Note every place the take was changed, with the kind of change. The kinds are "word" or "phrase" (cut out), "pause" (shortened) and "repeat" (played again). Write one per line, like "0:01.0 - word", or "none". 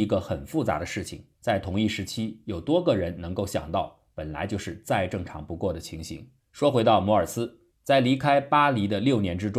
0:01.3 - pause
0:06.4 - pause
0:07.7 - pause